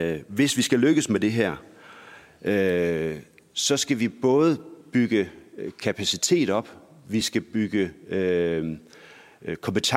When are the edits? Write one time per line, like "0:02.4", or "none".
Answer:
none